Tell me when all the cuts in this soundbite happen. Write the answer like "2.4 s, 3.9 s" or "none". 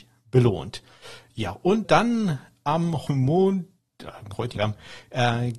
1.8 s, 3.1 s, 4.6 s